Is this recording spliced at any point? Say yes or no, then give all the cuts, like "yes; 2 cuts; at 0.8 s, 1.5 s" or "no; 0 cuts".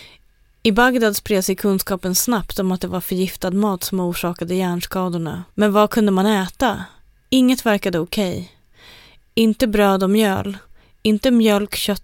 yes; 1 cut; at 5.5 s